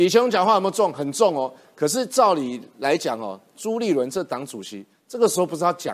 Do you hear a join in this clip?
no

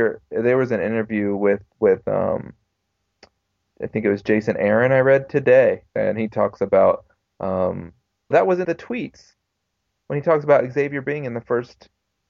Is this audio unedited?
no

